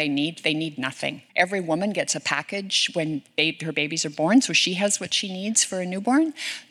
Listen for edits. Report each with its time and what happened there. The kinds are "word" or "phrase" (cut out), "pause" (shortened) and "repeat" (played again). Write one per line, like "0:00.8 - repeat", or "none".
0:01.3 - pause